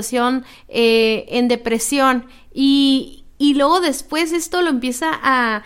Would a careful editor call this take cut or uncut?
uncut